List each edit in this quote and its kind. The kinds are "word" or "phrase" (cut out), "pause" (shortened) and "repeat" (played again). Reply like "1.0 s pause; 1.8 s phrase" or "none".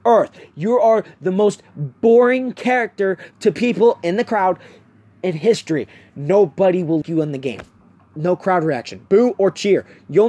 7.0 s word